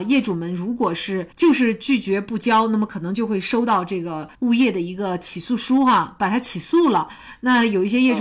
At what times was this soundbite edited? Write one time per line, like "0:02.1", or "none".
0:01.3
0:04.3